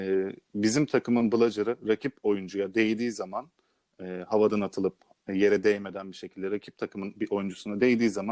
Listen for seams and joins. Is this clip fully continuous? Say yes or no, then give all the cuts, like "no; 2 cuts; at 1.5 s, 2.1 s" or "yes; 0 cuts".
yes; 0 cuts